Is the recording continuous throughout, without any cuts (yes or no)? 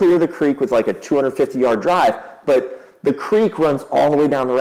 yes